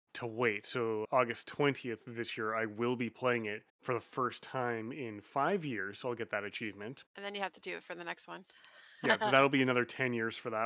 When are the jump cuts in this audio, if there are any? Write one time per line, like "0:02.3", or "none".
0:01.0
0:03.7
0:07.1